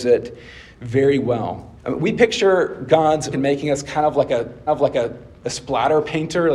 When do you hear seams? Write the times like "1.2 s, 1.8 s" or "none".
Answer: 1.8 s, 3.3 s, 4.7 s